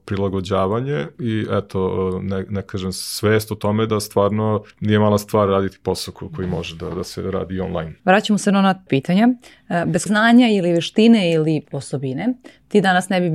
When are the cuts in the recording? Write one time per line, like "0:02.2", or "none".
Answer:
0:01.1
0:02.7
0:03.9
0:04.7
0:08.0
0:08.9
0:10.1
0:11.6